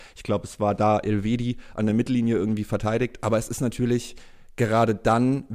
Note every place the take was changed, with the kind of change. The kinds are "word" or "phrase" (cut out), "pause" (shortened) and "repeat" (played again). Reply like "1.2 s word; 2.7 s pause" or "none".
none

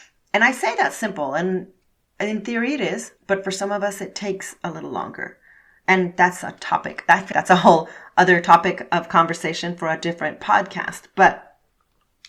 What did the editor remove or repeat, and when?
3.2 s pause; 7.3 s word

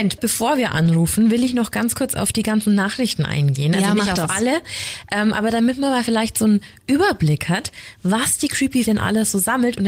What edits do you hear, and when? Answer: 8.8 s word

